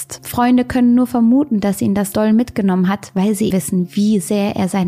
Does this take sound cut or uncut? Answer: cut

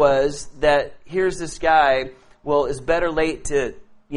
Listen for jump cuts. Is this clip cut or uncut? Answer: uncut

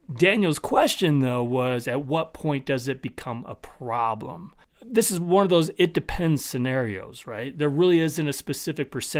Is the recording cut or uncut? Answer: uncut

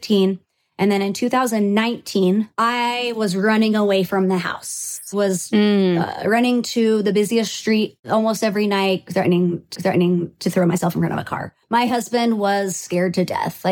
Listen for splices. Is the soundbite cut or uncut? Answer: cut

